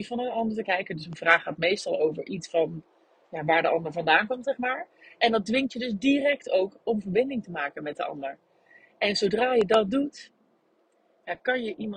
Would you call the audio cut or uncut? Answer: uncut